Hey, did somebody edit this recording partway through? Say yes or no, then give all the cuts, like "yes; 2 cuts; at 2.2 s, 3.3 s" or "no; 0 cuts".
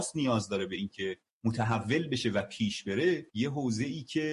yes; 1 cut; at 3.3 s